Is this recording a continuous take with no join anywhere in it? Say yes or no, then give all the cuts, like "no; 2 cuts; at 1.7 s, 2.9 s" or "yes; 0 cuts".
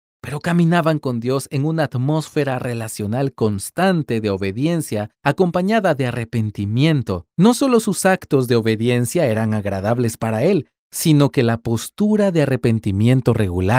no; 2 cuts; at 5.1 s, 7.3 s